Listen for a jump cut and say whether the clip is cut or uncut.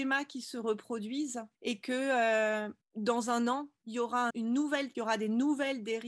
cut